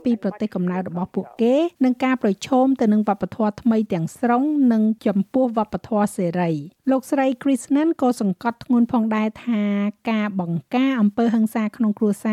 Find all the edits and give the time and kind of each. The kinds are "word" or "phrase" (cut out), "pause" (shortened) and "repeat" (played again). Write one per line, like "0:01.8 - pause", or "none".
0:01.7 - pause
0:06.8 - pause